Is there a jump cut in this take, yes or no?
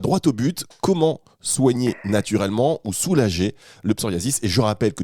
no